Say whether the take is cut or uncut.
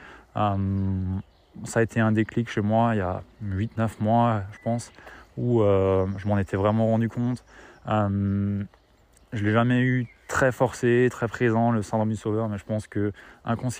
uncut